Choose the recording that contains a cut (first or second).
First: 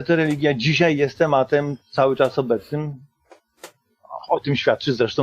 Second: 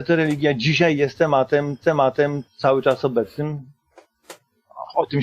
second